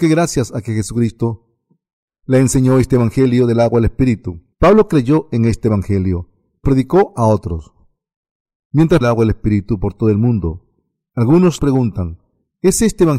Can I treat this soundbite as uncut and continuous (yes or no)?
no